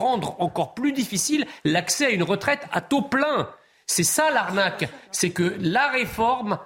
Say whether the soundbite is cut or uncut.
uncut